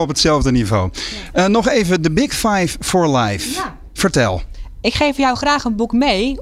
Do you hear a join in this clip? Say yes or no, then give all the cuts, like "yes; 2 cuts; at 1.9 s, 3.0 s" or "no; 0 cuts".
no; 0 cuts